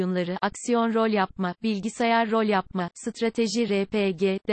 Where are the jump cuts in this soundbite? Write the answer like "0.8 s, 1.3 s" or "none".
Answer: none